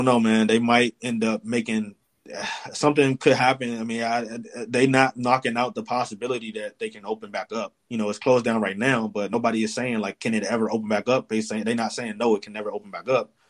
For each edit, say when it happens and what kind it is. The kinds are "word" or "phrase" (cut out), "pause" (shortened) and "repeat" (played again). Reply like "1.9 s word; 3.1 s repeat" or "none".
7.8 s pause